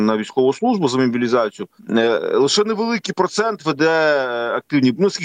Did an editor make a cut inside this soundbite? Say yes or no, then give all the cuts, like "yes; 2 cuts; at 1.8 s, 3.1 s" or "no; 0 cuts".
yes; 1 cut; at 1.8 s